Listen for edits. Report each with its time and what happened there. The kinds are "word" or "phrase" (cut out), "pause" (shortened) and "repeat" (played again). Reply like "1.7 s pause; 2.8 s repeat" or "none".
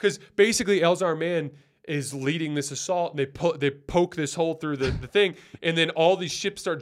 none

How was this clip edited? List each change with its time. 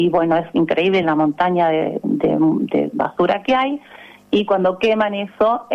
none

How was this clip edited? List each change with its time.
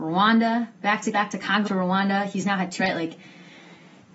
1.1 s word; 1.6 s word; 2.8 s word

